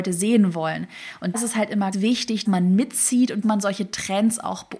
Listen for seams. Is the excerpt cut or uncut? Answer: cut